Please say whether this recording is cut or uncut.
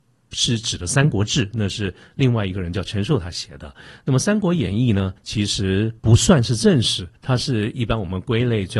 cut